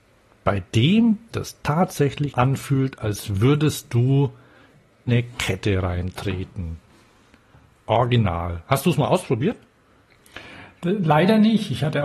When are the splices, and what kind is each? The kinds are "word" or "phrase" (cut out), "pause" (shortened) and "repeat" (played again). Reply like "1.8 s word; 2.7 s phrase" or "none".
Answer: 1.3 s word; 2.3 s word; 5.1 s word